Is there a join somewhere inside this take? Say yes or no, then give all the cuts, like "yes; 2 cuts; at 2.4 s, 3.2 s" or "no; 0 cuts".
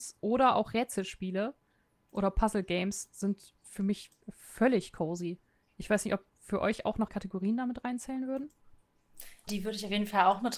yes; 2 cuts; at 7.1 s, 9.5 s